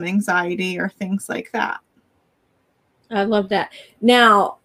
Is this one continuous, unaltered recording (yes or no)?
yes